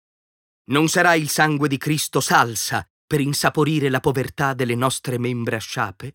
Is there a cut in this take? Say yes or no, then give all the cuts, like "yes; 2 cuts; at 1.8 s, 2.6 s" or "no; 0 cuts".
no; 0 cuts